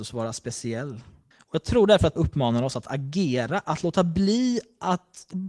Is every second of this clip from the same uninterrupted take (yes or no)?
no